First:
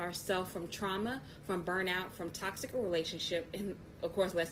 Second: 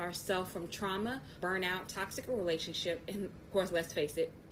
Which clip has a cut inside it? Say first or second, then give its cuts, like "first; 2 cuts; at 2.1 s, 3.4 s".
second; 3 cuts; at 1.4 s, 1.9 s, 3.5 s